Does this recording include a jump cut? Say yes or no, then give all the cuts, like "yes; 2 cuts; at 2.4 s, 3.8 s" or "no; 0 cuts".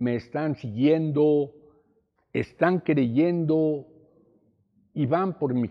no; 0 cuts